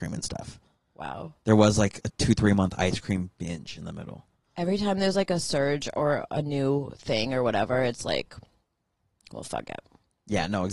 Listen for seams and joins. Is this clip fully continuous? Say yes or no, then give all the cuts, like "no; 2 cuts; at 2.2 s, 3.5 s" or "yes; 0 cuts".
yes; 0 cuts